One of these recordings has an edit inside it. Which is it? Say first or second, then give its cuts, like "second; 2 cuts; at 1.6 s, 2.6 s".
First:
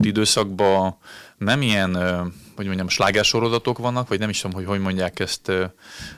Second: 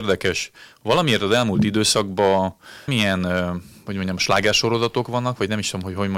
second; 1 cut; at 2.9 s